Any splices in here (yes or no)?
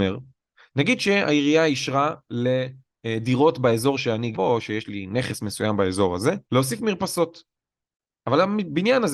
yes